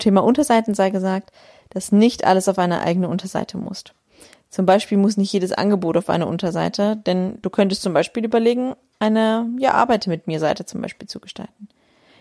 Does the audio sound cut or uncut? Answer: uncut